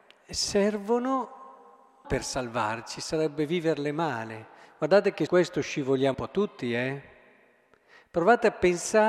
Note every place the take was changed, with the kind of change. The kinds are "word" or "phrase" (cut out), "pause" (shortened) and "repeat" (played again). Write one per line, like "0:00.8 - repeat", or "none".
0:02.0 - word
0:05.3 - word
0:06.1 - word